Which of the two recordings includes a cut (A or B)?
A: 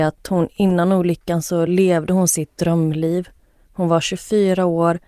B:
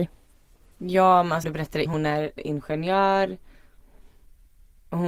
B